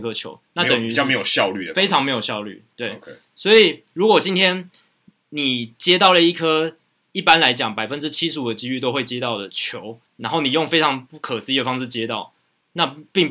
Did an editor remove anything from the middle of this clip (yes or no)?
yes